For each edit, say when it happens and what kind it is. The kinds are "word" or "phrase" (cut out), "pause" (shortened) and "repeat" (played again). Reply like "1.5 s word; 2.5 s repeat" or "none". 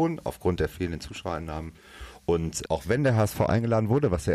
2.7 s word